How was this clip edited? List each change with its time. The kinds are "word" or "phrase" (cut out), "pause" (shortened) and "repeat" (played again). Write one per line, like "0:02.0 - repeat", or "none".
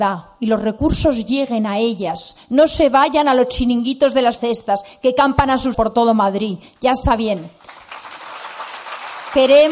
0:04.4 - word
0:05.7 - word